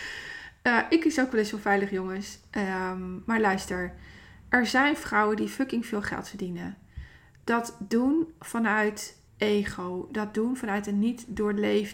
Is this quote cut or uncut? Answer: cut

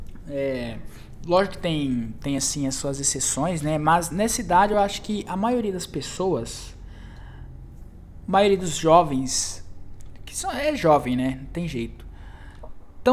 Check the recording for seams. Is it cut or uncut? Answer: uncut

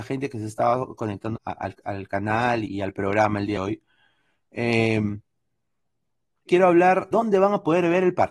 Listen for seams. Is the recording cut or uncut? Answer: cut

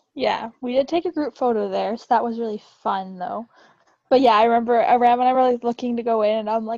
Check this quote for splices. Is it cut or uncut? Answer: uncut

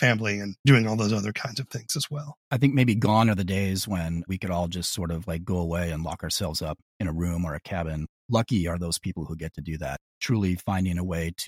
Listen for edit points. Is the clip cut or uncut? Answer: uncut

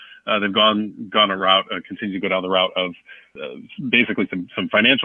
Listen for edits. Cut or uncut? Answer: uncut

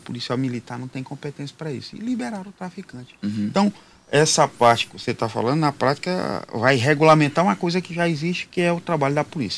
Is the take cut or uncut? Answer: uncut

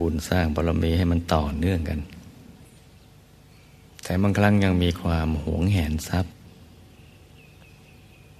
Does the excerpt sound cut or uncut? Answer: uncut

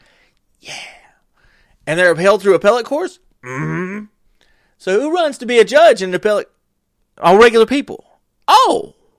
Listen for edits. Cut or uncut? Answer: uncut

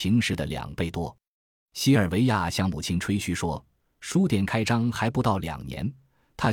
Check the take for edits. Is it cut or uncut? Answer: uncut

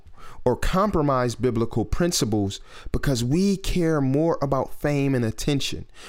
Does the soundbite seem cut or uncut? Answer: uncut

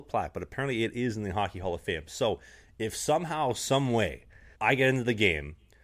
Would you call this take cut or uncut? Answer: cut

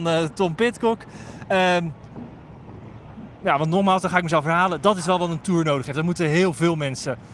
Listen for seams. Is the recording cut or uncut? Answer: uncut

